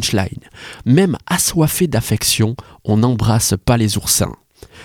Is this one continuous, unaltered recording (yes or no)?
yes